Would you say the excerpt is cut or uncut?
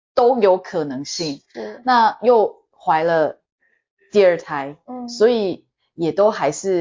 uncut